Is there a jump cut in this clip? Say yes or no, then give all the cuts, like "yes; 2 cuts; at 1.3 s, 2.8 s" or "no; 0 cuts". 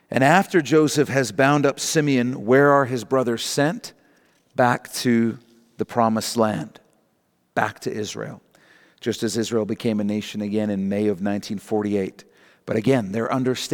no; 0 cuts